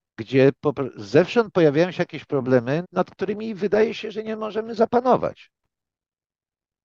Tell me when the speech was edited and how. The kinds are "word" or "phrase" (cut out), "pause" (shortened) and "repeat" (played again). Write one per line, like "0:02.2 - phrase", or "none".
0:02.8 - word